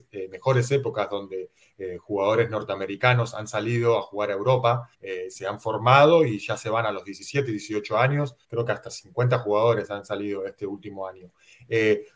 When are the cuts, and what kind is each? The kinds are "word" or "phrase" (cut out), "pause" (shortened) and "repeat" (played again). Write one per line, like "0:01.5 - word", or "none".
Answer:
0:04.9 - pause
0:08.4 - pause